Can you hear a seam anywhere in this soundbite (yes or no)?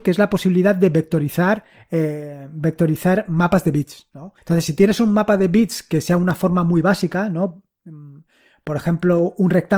yes